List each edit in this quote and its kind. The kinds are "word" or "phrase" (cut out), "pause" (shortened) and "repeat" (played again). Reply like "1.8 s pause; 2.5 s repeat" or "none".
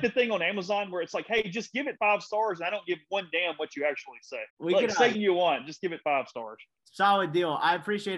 4.5 s pause; 5.1 s word